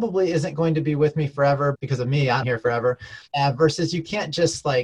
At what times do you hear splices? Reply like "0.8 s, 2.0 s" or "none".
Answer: 1.7 s, 2.4 s, 3.3 s